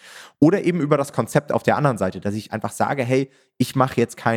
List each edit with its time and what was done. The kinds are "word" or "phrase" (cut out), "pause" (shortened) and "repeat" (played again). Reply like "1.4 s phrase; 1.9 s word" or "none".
none